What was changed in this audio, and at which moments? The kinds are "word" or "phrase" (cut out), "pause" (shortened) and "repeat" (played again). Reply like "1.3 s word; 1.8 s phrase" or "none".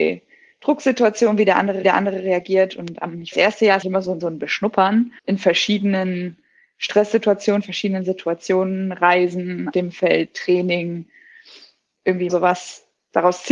1.8 s repeat; 3.3 s phrase; 3.8 s word; 4.2 s word; 5.2 s pause; 9.7 s word; 12.3 s phrase